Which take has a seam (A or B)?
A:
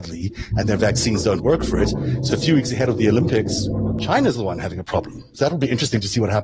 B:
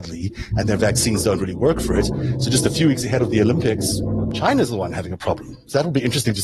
A